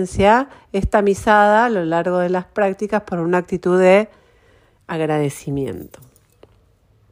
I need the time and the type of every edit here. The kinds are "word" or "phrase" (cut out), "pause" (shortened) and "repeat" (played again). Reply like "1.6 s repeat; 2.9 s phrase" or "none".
none